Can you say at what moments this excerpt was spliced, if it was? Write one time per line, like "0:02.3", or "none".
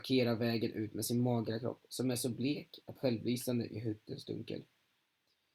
0:03.0